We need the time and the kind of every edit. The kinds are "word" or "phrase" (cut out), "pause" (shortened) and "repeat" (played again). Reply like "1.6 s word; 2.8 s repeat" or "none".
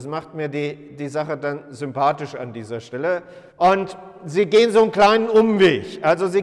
3.5 s pause